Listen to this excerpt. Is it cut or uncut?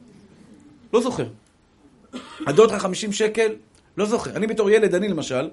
cut